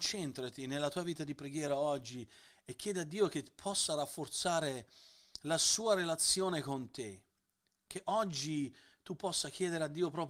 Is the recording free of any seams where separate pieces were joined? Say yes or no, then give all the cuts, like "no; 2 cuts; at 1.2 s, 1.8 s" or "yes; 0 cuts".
yes; 0 cuts